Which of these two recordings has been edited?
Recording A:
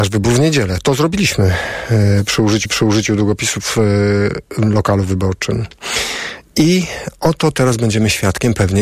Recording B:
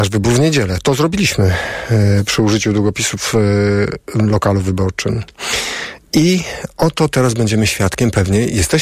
A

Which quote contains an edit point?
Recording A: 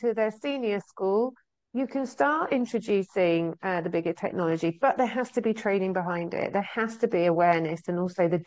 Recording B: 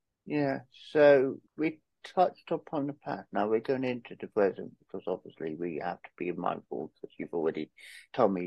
B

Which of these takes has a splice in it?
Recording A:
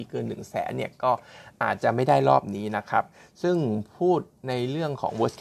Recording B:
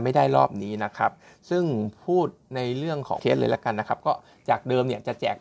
B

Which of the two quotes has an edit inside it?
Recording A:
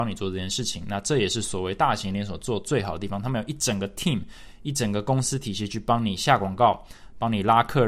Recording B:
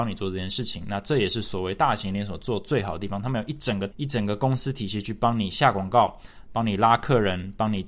B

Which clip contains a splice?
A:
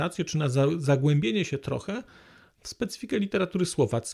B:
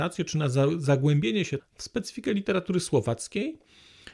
B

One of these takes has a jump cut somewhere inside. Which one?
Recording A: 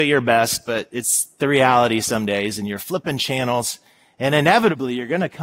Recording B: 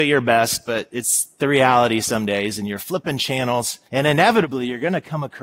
B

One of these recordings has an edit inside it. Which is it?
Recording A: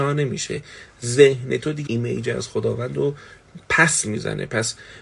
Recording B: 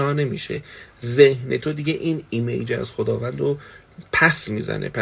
A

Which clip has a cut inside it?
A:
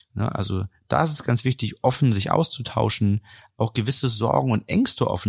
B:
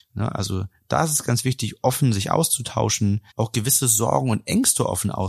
B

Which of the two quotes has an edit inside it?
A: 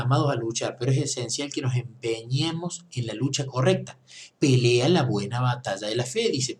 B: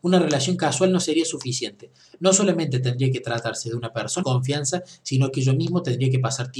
B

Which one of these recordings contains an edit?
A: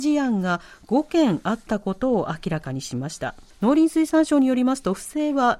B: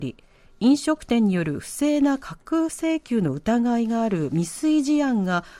A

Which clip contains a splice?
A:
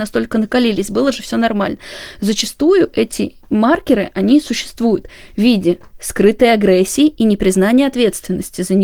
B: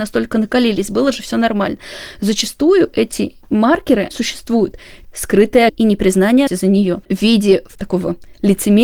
B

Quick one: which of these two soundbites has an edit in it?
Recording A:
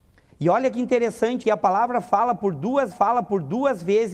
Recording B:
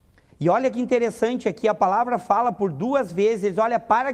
A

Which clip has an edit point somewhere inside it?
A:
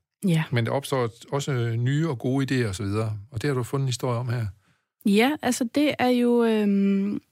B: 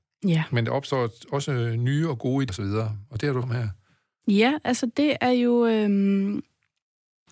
B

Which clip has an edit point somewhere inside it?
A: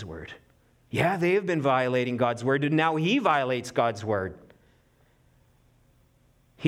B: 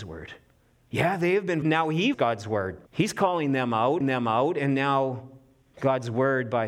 B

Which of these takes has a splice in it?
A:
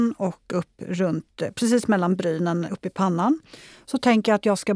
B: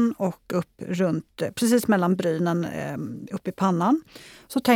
A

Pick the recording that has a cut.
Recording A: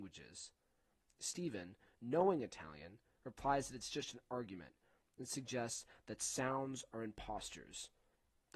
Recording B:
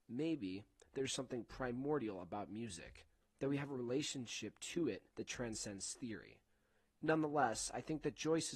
B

